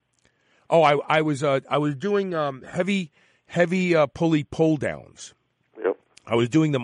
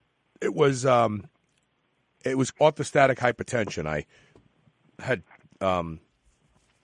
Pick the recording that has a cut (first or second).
second